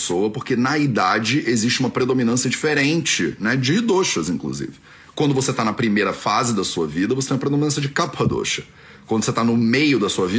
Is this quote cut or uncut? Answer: uncut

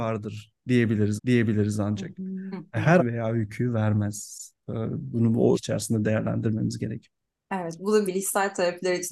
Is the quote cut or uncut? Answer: cut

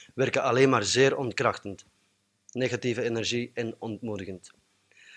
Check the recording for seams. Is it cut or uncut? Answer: uncut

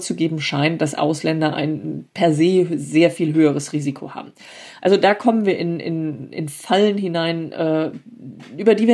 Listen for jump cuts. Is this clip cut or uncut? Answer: uncut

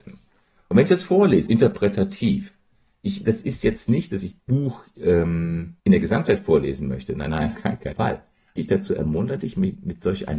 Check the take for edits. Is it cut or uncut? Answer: cut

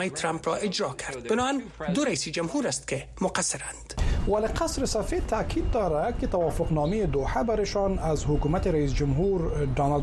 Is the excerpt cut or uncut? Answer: uncut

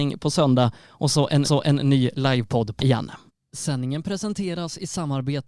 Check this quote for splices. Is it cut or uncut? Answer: cut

